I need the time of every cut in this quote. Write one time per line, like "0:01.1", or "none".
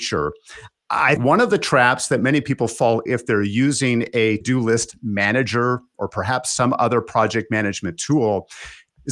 0:01.2
0:03.1
0:04.4